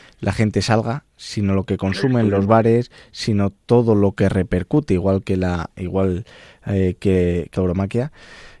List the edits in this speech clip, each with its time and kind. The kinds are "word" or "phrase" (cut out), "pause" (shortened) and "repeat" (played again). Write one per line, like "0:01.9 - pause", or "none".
0:07.5 - word